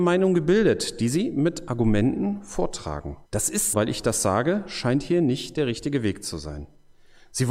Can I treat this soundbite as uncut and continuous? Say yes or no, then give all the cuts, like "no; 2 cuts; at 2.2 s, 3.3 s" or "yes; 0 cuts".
no; 2 cuts; at 3.2 s, 3.7 s